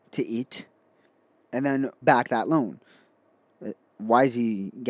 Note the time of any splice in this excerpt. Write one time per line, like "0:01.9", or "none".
0:02.0